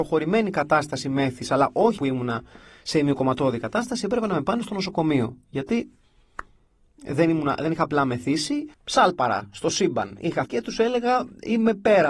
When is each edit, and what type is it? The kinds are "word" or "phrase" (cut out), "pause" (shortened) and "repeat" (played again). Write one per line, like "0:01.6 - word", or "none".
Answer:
0:02.0 - phrase
0:08.7 - pause
0:10.5 - word